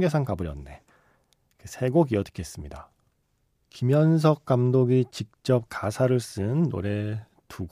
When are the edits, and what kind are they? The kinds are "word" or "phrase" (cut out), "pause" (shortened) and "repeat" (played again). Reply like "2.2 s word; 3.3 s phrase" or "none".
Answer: none